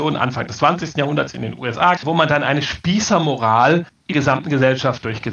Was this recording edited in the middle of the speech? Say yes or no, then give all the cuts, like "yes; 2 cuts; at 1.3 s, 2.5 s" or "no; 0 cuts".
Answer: yes; 2 cuts; at 2.0 s, 4.1 s